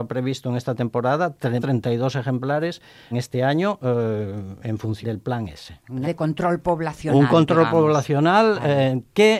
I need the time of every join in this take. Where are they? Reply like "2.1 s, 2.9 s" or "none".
1.6 s, 3.1 s, 5.0 s, 6.0 s